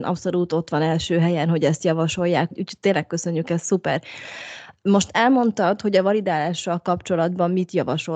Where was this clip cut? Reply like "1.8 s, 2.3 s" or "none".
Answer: 2.5 s

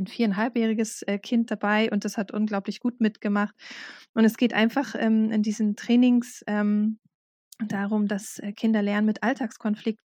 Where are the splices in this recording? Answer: none

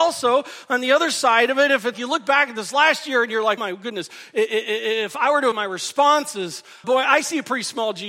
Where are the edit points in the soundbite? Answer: 1.9 s, 3.6 s, 5.5 s, 6.8 s

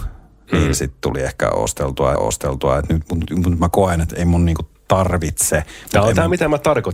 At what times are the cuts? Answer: 2.1 s

